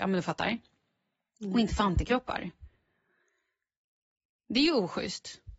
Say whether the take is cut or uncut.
uncut